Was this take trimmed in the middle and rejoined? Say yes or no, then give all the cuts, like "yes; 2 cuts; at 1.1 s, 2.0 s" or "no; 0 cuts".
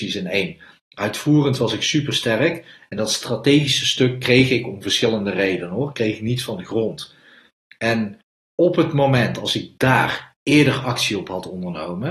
no; 0 cuts